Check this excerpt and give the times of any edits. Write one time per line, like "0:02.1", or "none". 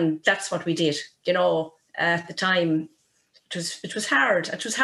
none